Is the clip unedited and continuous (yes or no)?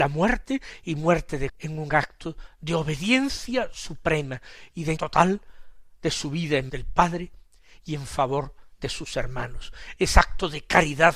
no